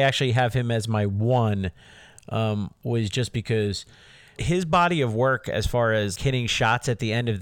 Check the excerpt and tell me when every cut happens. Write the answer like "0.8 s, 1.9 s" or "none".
4.4 s, 6.2 s